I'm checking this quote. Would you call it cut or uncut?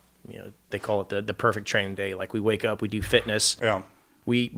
uncut